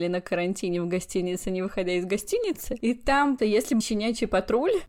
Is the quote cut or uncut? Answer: cut